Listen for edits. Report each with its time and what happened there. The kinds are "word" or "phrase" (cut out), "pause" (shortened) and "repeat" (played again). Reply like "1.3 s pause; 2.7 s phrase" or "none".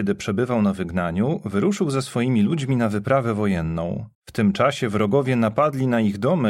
4.1 s pause